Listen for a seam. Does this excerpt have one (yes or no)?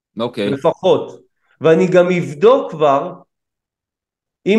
no